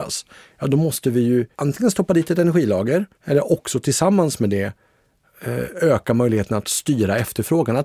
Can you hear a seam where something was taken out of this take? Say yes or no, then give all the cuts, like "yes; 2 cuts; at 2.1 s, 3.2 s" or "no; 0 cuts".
yes; 2 cuts; at 1.5 s, 3.1 s